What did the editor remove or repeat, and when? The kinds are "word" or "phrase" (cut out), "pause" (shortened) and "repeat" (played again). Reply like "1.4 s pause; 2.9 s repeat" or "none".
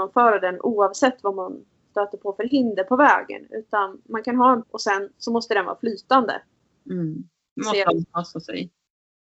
4.6 s word; 5.1 s pause